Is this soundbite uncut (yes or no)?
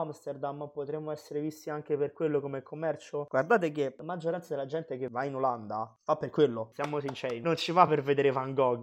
yes